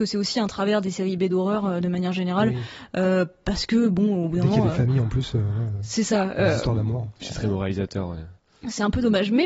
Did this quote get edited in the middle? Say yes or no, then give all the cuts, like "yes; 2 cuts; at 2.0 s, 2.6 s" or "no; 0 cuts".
no; 0 cuts